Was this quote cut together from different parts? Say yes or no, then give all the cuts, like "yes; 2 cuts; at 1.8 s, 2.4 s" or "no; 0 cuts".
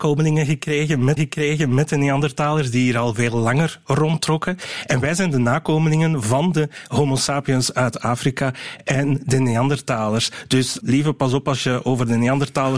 yes; 2 cuts; at 1.2 s, 10.8 s